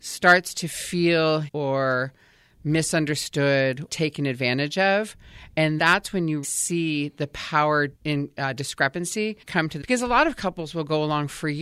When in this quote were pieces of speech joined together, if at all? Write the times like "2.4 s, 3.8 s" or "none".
1.5 s, 3.9 s, 5.8 s, 6.4 s, 7.9 s, 9.4 s, 9.8 s